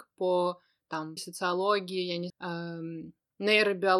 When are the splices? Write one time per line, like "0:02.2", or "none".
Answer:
0:01.2
0:02.3